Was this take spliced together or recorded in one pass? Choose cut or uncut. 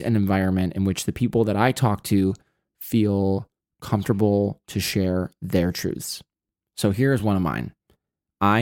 uncut